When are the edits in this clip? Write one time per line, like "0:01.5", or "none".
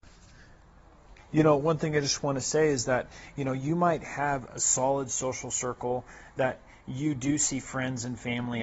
none